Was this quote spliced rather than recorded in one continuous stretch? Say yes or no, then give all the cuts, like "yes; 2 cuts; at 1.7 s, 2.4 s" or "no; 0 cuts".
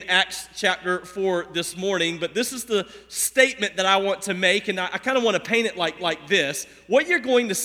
yes; 1 cut; at 6.0 s